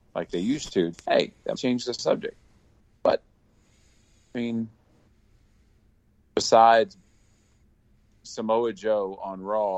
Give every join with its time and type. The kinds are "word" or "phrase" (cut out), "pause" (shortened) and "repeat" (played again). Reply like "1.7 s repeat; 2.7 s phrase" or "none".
0.9 s word; 1.5 s word; 8.2 s word